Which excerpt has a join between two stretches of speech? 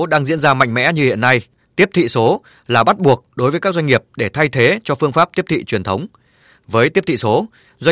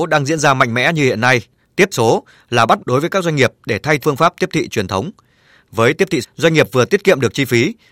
second; 4 cuts; at 1.9 s, 2.8 s, 4.0 s, 6.2 s

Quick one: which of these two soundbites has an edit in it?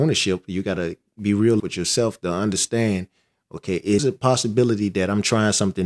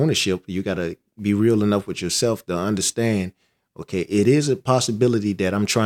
first; 2 cuts; at 1.6 s, 4.0 s

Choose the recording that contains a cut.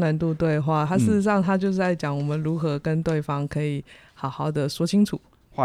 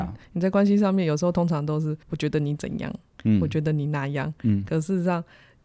second; 1 cut; at 2.0 s

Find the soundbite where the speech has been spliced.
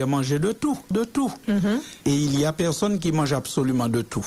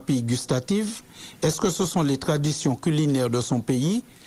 first; 2 cuts; at 0.9 s, 2.0 s

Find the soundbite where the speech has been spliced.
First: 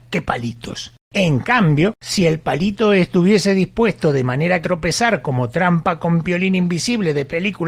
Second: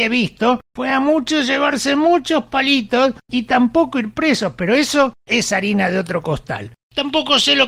first; 1 cut; at 4.6 s

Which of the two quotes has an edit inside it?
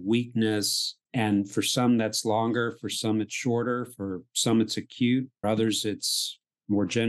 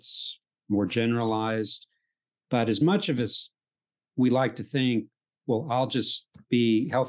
first; 2 cuts; at 1.0 s, 5.4 s

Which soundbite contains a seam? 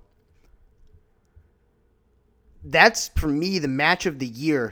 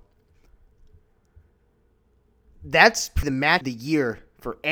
second; 2 cuts; at 3.2 s, 3.6 s

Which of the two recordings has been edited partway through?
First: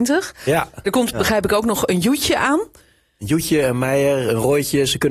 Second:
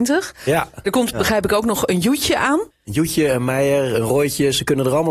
second; 1 cut; at 2.7 s

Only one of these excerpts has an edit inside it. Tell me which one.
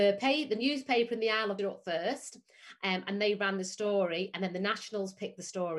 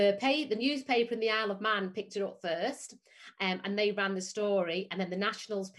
first; 1 cut; at 1.6 s

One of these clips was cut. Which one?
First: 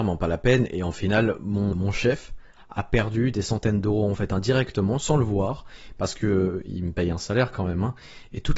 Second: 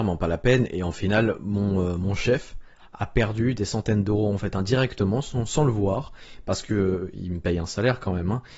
first; 2 cuts; at 1.7 s, 5.0 s

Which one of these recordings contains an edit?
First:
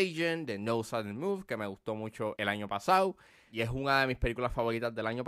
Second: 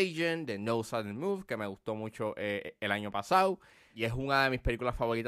first; 1 cut; at 2.4 s

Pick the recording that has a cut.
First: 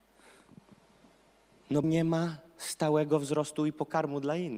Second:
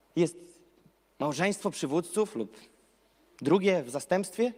first; 1 cut; at 1.8 s

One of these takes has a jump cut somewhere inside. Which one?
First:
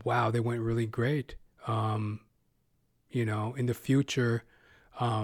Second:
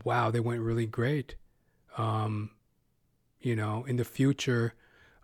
first; 1 cut; at 1.5 s

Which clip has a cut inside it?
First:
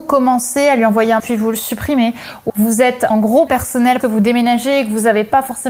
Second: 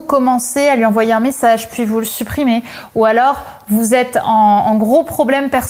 first; 5 cuts; at 1.2 s, 2.5 s, 3.1 s, 3.5 s, 4.0 s

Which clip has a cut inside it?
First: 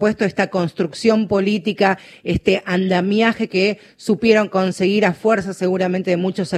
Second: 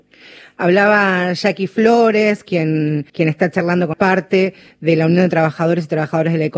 second; 2 cuts; at 3.1 s, 3.9 s

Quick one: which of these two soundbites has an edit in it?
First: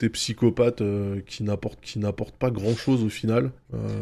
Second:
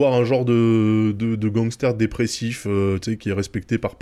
first; 1 cut; at 1.8 s

